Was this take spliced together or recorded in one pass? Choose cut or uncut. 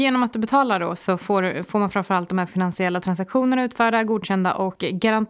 uncut